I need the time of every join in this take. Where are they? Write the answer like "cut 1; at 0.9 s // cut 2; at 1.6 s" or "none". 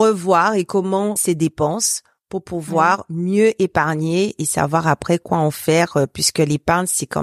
cut 1; at 1.2 s